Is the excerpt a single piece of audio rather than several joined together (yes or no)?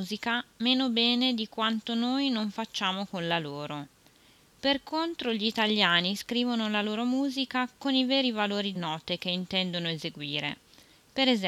no